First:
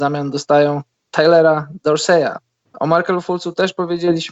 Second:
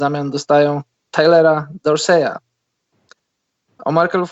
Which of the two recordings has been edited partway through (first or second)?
first